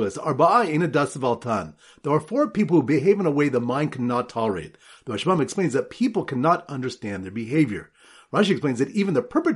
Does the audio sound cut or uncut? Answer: uncut